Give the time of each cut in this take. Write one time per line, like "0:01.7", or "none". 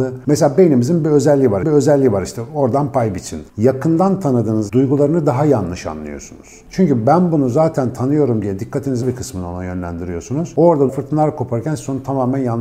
0:01.6
0:04.7
0:09.0
0:10.9